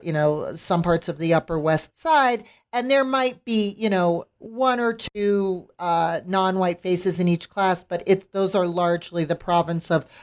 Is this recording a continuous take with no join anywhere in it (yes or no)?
yes